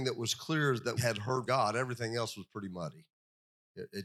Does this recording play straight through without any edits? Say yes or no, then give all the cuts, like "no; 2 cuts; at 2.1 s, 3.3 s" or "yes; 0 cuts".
no; 2 cuts; at 1.0 s, 1.5 s